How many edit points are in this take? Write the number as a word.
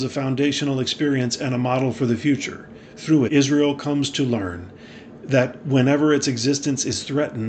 one